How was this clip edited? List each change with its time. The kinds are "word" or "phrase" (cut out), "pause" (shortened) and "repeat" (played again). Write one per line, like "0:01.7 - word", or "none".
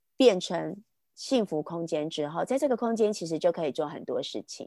none